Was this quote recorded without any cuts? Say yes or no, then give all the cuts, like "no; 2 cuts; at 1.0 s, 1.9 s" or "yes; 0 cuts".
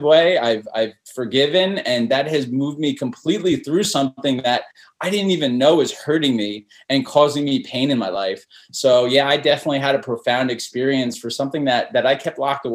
yes; 0 cuts